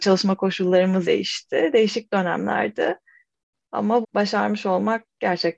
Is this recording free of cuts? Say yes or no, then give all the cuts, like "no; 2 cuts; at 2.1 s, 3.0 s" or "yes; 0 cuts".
no; 2 cuts; at 1.0 s, 4.0 s